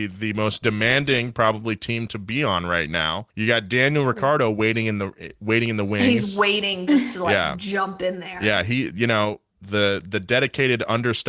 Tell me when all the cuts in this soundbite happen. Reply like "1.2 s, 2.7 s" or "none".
3.3 s